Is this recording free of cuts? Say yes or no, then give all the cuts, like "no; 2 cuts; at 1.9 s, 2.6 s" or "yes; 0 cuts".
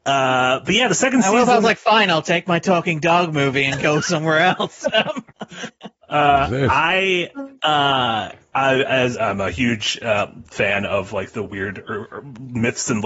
no; 1 cut; at 9.1 s